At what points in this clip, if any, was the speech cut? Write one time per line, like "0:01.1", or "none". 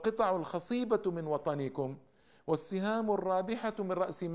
none